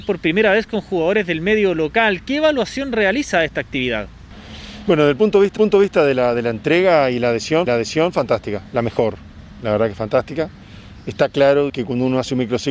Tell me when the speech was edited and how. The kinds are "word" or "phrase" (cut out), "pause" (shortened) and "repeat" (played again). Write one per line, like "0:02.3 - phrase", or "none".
0:05.6 - repeat
0:07.7 - repeat
0:11.7 - word